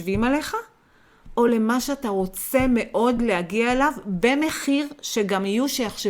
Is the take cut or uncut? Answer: uncut